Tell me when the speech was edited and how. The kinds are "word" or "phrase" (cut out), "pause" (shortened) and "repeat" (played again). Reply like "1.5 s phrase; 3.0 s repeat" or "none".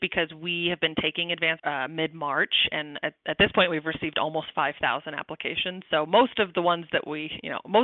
1.6 s phrase